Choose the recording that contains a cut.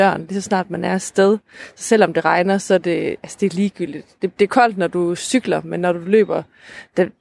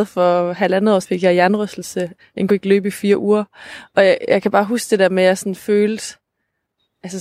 second; 3 cuts; at 1.0 s, 2.2 s, 2.5 s

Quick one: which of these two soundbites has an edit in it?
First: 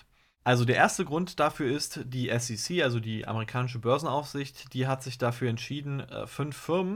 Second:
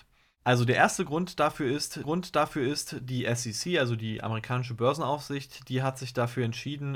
second; 1 cut; at 2.0 s

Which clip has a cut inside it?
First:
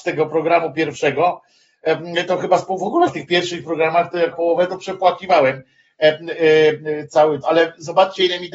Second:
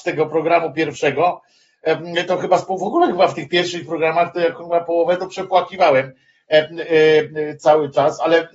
first; 3 cuts; at 3.1 s, 4.3 s, 7.4 s

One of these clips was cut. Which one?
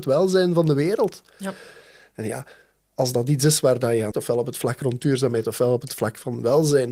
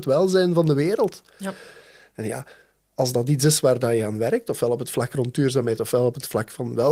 first; 1 cut; at 4.1 s

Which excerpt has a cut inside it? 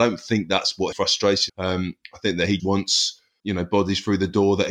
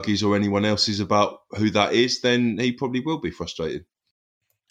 first; 4 cuts; at 0.9 s, 1.5 s, 2.6 s, 3.4 s

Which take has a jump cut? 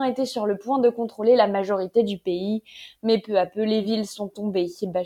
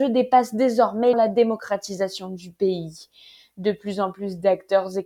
second; 1 cut; at 1.1 s

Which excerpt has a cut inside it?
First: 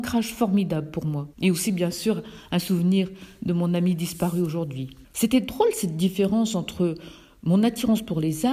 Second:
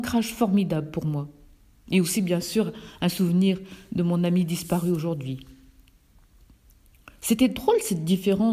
first; 2 cuts; at 1.3 s, 5.0 s

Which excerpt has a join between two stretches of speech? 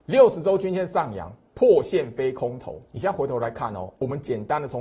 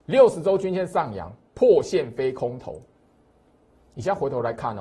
first; 1 cut; at 2.9 s

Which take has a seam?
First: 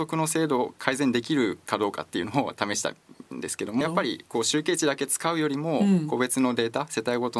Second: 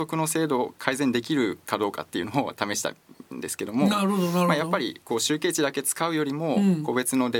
first; 1 cut; at 3.8 s

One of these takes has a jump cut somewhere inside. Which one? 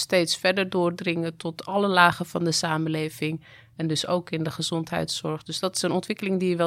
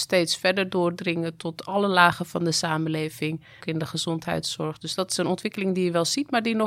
second; 1 cut; at 3.6 s

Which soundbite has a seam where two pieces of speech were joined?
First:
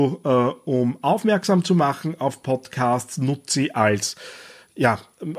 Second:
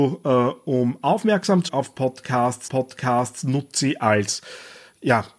second; 2 cuts; at 1.7 s, 2.7 s

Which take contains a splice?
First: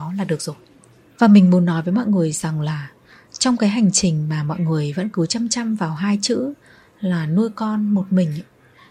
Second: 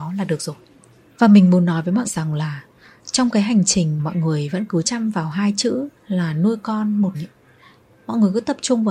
second; 5 cuts; at 2.0 s, 4.0 s, 4.8 s, 6.0 s, 7.1 s

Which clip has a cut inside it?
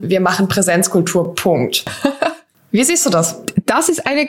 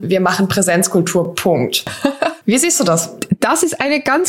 second; 1 cut; at 2.4 s

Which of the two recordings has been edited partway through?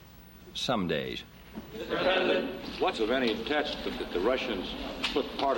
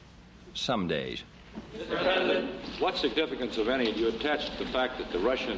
first; 3 cuts; at 2.9 s, 3.4 s, 4.0 s

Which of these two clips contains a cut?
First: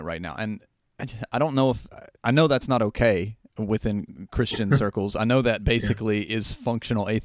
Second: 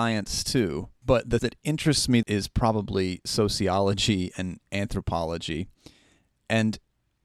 second; 3 cuts; at 1.0 s, 1.4 s, 2.2 s

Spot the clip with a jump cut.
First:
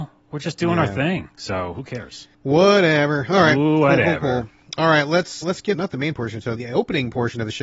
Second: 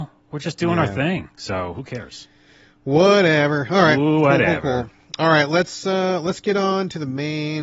first; 4 cuts; at 2.3 s, 5.4 s, 5.7 s, 6.6 s

